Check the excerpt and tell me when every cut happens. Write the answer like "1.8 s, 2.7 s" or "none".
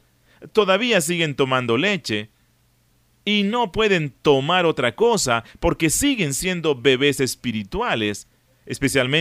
none